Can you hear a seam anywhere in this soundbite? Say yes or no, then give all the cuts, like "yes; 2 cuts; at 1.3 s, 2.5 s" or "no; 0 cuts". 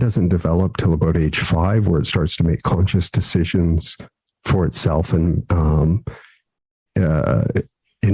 no; 0 cuts